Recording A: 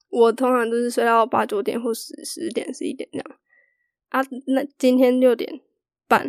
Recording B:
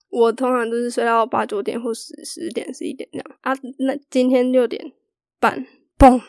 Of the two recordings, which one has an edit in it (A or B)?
B